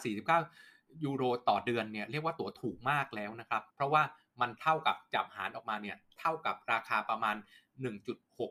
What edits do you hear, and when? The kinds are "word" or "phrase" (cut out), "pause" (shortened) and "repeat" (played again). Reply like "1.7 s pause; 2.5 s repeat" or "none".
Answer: 3.7 s pause